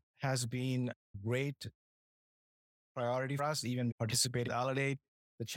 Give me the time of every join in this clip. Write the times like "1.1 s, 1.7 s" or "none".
1.1 s, 3.4 s, 3.9 s, 4.5 s